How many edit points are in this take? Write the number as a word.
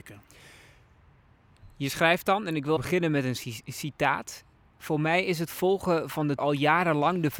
two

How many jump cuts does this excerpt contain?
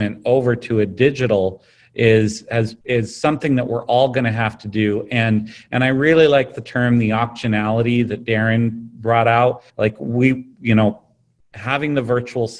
three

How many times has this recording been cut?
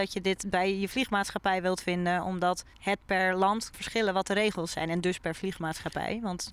two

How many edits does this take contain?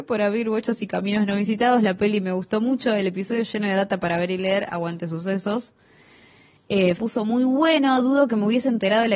one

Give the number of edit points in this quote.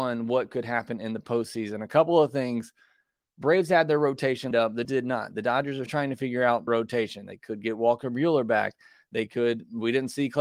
four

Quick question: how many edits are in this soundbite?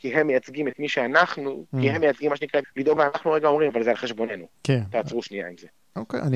four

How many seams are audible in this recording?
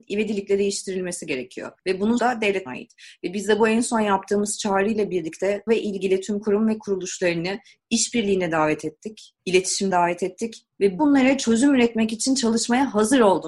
six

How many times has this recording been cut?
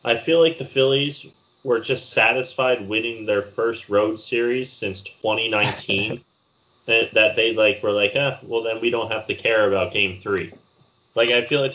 zero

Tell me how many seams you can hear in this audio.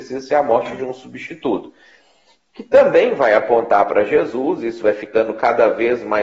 zero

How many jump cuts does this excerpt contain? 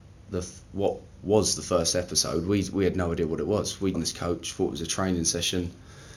one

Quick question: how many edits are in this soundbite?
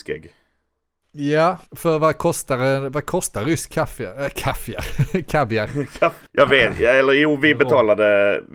two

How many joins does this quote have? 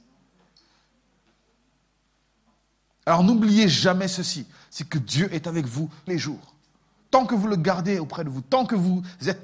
one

